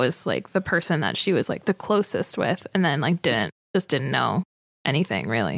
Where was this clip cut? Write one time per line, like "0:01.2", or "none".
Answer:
0:03.5